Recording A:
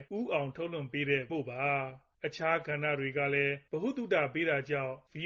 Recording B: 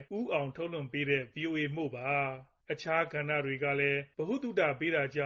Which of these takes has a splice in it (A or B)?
A